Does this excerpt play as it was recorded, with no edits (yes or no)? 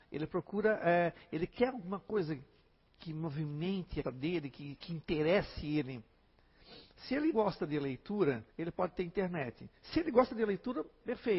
no